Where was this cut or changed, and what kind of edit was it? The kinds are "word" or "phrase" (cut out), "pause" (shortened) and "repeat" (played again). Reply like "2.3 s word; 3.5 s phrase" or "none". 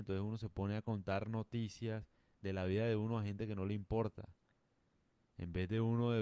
none